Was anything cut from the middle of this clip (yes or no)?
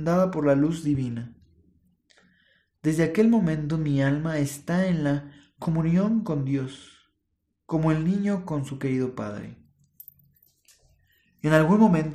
no